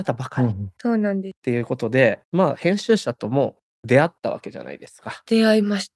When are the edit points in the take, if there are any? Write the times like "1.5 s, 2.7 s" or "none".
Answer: 2.2 s